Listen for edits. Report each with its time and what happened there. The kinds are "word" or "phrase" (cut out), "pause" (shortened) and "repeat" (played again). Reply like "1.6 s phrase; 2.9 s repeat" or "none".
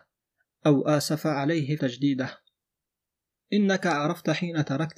1.8 s word